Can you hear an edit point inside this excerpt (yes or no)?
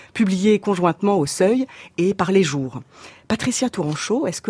no